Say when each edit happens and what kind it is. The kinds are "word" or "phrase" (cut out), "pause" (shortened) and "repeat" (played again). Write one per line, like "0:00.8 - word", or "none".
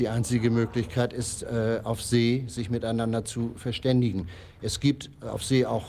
none